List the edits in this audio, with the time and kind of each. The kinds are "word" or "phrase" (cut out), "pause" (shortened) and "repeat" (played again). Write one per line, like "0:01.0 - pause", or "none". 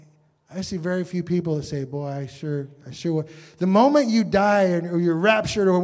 none